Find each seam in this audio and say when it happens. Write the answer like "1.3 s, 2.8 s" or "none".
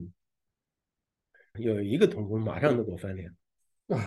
1.5 s